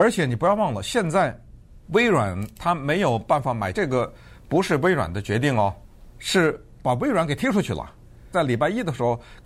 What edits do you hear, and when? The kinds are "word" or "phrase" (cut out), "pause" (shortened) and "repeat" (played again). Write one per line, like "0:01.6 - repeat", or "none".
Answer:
0:01.8 - pause
0:03.7 - word
0:06.8 - word
0:08.3 - phrase

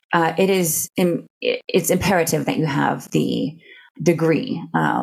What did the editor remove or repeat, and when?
none

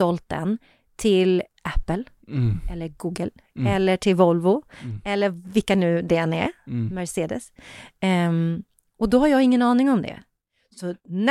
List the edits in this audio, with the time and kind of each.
0:01.5 - word

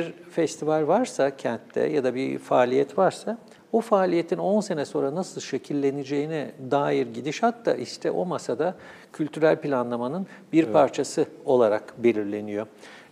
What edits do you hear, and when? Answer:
none

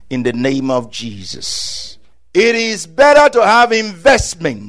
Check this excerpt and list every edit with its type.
none

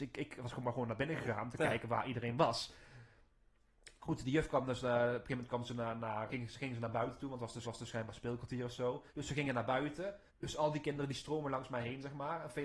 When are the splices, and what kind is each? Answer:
0:06.3 - word
0:07.6 - repeat
0:09.1 - pause
0:10.3 - pause

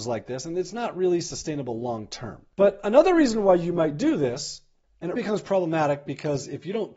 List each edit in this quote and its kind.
0:05.2 - word

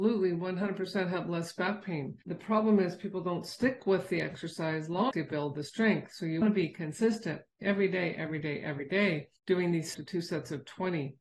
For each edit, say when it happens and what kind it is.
0:02.2 - pause
0:05.1 - word
0:06.4 - word
0:09.4 - pause
0:09.9 - phrase

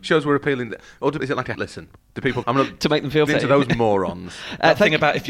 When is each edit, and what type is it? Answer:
0:01.2 - word
0:01.5 - word
0:02.4 - word
0:03.3 - word

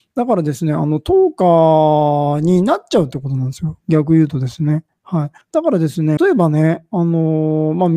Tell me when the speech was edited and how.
0:05.4 - pause
0:06.2 - phrase

